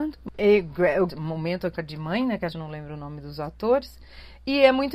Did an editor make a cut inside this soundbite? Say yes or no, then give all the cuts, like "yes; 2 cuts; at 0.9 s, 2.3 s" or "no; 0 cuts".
yes; 3 cuts; at 1.1 s, 1.7 s, 2.5 s